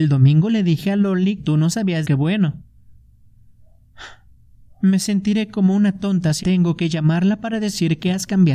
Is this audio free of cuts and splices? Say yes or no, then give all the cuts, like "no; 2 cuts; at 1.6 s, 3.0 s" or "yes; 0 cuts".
no; 3 cuts; at 1.4 s, 2.0 s, 6.4 s